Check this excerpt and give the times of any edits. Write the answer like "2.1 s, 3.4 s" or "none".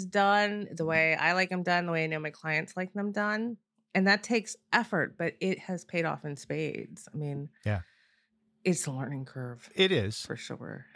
none